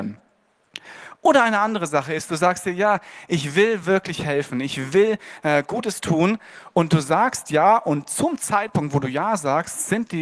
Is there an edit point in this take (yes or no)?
no